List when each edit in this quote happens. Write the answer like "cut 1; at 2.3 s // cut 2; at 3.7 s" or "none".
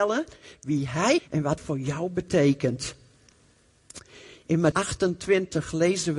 cut 1; at 1.2 s // cut 2; at 1.6 s // cut 3; at 4.7 s